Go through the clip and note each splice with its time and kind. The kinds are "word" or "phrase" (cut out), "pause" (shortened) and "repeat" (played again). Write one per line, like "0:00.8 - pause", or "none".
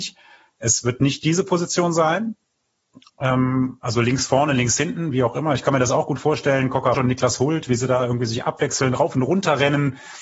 0:06.9 - word